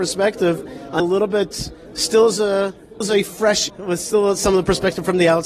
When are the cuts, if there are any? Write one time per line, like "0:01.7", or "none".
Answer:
0:01.0
0:03.0
0:03.7